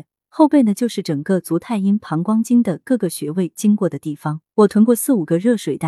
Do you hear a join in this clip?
yes; 1 cut; at 4.5 s

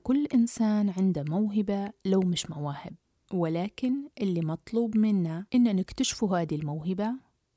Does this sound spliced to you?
yes; 2 cuts; at 3.0 s, 5.5 s

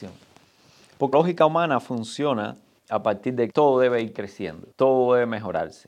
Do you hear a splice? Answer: yes; 4 cuts; at 1.1 s, 2.8 s, 3.5 s, 4.7 s

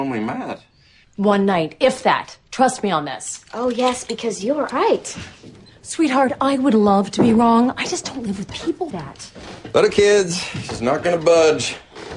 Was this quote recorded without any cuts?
no; 4 cuts; at 4.7 s, 8.5 s, 8.9 s, 9.9 s

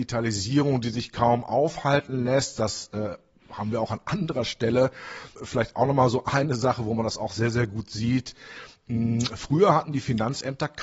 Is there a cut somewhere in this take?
no; 0 cuts

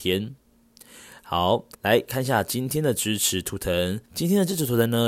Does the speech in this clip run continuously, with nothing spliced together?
no; 2 cuts; at 1.7 s, 4.1 s

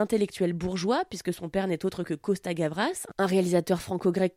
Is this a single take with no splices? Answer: yes; 0 cuts

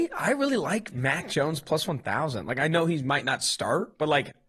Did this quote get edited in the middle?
no; 0 cuts

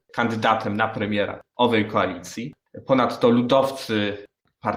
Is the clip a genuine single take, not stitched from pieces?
yes; 0 cuts

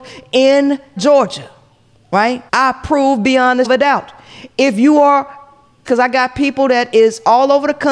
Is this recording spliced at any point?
yes; 4 cuts; at 1.0 s, 2.5 s, 3.6 s, 5.8 s

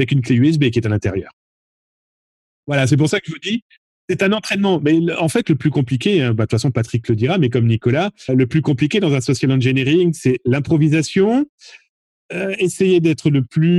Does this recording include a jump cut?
yes; 1 cut; at 8.3 s

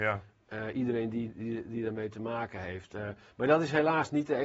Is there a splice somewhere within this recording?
no; 0 cuts

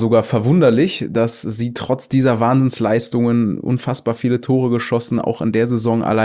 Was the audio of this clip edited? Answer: no; 0 cuts

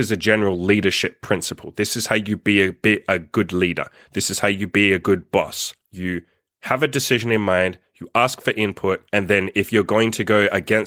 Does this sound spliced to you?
yes; 2 cuts; at 5.8 s, 9.1 s

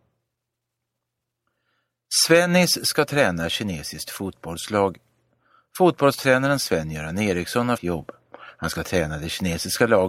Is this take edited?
yes; 1 cut; at 7.8 s

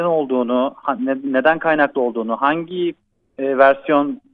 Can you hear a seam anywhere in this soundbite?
no; 0 cuts

